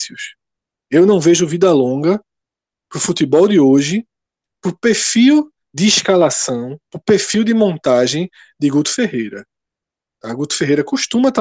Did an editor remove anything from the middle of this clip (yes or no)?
yes